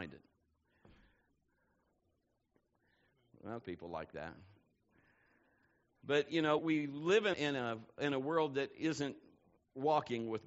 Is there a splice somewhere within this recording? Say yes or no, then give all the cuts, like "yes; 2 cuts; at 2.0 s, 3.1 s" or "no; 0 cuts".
yes; 3 cuts; at 3.6 s, 6.6 s, 7.3 s